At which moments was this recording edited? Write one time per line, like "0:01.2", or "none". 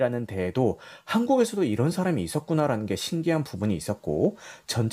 none

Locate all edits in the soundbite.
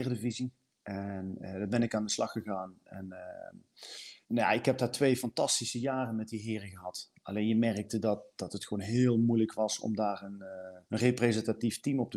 0:04.2
0:10.8

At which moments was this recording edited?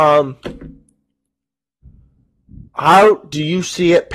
0:02.7

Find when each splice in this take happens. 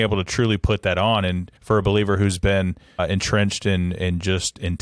0:01.6

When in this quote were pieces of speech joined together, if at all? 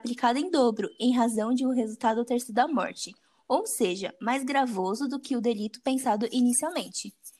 none

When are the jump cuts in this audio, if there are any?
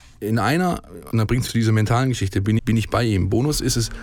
0:01.1
0:01.5
0:02.6

